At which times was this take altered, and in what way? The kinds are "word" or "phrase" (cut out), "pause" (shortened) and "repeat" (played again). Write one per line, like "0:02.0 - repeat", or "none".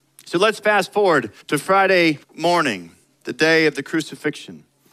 0:01.4 - pause
0:02.2 - pause

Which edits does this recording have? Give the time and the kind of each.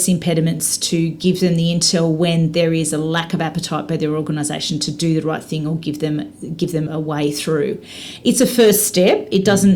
0:06.9 - word

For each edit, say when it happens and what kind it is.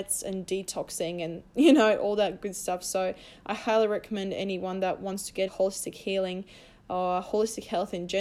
0:05.5 - word

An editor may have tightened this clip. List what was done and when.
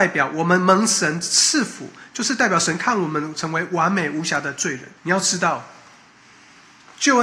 0:05.0 - pause

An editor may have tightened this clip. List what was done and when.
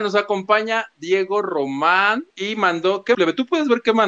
0:02.3 - pause
0:03.1 - word

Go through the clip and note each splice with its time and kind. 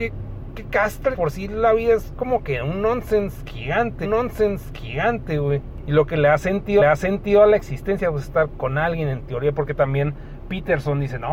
0:01.1 - word
0:04.0 - repeat
0:06.8 - repeat
0:08.5 - word

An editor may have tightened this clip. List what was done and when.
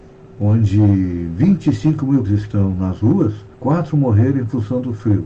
0:02.2 - word
0:03.5 - pause

